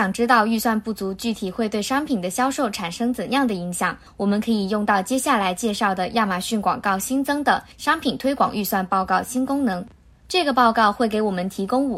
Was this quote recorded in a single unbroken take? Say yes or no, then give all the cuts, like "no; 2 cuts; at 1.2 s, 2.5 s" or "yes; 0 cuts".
yes; 0 cuts